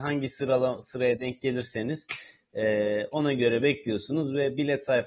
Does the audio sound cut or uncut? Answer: uncut